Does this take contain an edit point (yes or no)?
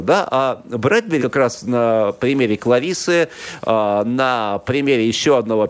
yes